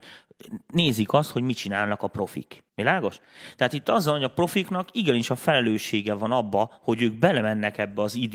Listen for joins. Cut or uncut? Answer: cut